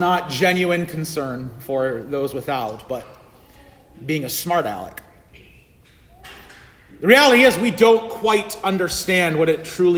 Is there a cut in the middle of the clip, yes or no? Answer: no